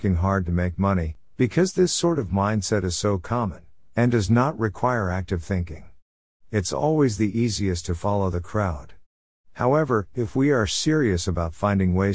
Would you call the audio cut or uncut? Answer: uncut